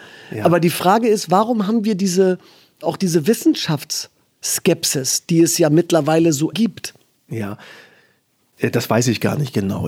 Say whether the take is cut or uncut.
cut